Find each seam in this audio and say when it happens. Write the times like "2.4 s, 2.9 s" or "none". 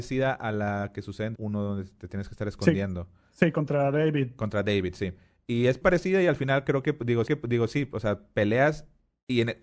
1.3 s, 5.8 s, 7.3 s